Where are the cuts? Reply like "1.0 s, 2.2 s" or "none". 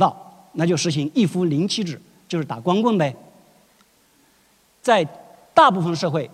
none